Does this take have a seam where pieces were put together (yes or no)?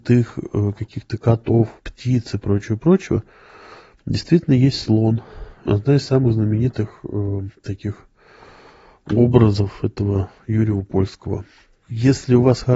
no